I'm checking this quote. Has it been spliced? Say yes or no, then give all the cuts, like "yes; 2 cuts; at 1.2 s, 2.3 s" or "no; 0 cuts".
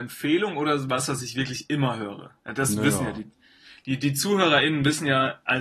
yes; 1 cut; at 2.4 s